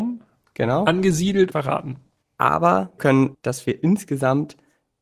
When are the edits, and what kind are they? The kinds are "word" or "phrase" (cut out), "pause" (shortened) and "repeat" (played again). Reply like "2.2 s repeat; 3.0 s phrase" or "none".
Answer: 1.5 s phrase; 3.0 s word; 3.3 s phrase